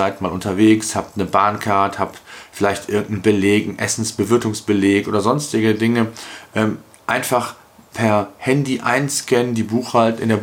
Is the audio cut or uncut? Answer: uncut